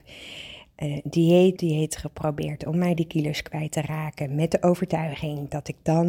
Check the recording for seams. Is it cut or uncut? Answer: cut